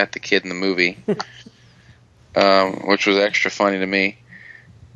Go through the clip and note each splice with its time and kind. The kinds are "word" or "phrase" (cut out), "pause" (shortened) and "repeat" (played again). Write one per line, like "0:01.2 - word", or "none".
none